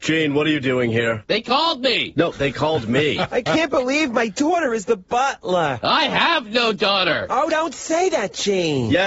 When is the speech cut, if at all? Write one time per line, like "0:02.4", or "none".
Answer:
none